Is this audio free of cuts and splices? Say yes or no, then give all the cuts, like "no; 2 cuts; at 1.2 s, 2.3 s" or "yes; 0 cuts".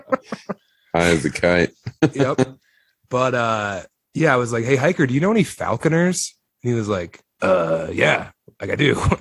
yes; 0 cuts